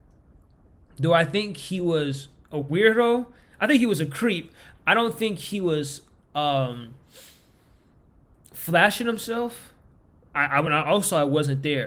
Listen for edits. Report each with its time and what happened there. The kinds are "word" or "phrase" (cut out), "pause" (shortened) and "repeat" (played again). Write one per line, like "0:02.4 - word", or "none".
none

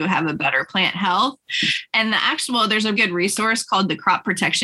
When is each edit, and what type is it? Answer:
0:03.0 - word

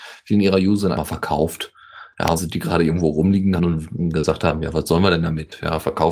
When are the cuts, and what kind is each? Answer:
0:00.9 - word
0:02.4 - word
0:03.6 - word

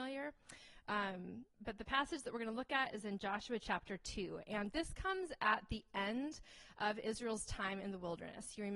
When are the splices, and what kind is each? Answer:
0:01.5 - pause

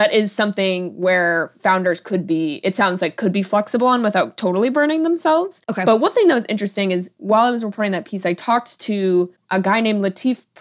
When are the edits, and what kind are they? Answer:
none

